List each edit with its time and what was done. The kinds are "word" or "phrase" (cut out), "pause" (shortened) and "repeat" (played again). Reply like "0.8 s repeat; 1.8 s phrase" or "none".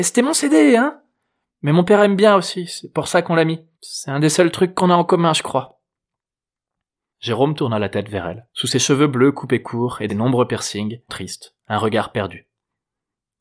3.7 s pause; 8.5 s pause; 10.1 s phrase; 11.1 s phrase